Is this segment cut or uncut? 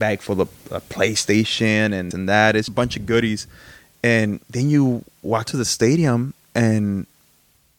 cut